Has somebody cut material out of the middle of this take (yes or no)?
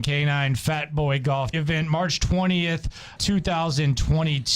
yes